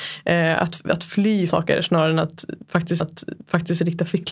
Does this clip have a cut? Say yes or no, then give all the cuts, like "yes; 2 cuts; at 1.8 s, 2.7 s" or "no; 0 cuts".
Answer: yes; 2 cuts; at 1.5 s, 3.0 s